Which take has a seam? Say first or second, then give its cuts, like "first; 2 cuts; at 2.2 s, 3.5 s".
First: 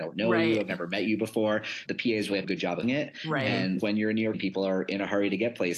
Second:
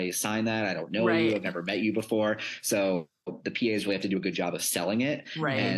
first; 5 cuts; at 1.9 s, 2.4 s, 2.8 s, 3.8 s, 4.3 s